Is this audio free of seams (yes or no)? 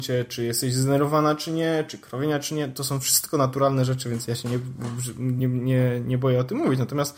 yes